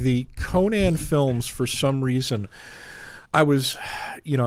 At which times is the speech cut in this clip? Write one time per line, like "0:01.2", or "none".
0:03.3